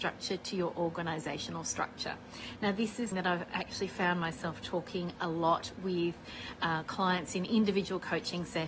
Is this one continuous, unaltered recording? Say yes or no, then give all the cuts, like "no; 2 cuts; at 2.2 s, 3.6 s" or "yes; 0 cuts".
no; 1 cut; at 3.1 s